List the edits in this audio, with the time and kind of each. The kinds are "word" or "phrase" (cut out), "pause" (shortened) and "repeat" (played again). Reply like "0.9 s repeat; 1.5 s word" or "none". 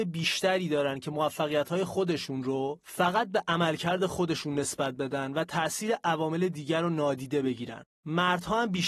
7.9 s pause